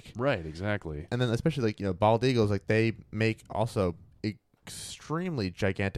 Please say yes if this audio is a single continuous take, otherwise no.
yes